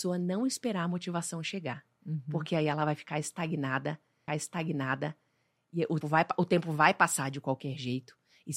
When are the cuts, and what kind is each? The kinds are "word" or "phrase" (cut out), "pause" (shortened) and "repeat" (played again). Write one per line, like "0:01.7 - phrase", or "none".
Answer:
0:04.3 - repeat
0:06.0 - word